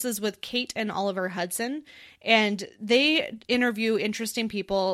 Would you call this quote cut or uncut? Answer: uncut